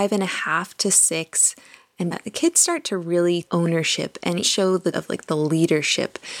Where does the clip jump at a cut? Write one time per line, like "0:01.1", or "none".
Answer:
0:02.1
0:03.4
0:04.4
0:04.9

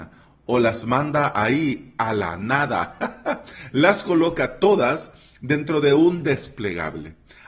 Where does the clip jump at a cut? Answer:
none

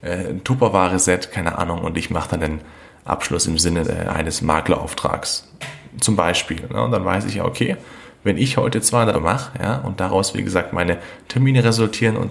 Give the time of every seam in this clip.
0:02.4
0:03.8
0:09.1

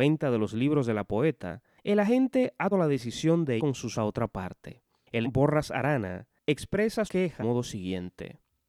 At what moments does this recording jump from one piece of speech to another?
0:02.7
0:03.6
0:03.9
0:05.2
0:07.1
0:07.4

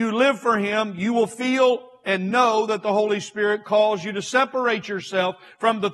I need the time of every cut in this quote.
none

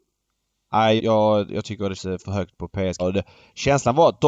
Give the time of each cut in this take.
0:01.0
0:02.0
0:03.0

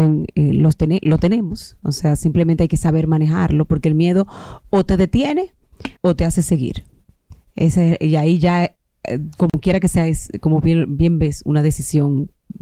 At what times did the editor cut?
0:06.0

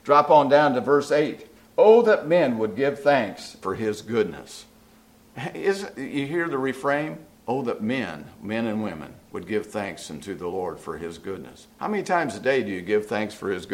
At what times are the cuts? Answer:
0:03.6
0:07.3
0:11.7

